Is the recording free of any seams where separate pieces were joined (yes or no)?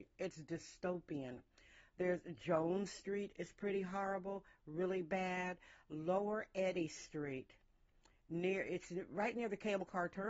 yes